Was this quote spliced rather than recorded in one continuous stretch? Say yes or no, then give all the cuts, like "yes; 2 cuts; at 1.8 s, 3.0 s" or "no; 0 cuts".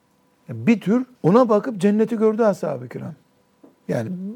yes; 1 cut; at 1.1 s